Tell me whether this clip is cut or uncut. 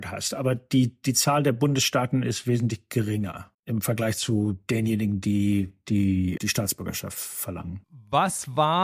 cut